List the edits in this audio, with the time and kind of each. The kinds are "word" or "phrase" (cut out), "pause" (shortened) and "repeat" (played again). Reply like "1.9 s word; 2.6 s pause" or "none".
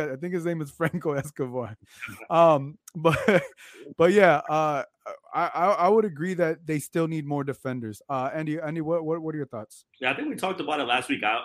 9.9 s pause